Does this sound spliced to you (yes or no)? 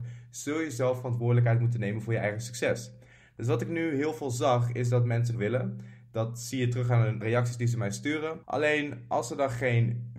yes